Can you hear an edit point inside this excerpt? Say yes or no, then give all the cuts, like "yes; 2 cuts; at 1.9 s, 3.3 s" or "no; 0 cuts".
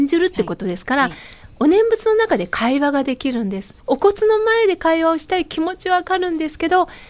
yes; 1 cut; at 3.8 s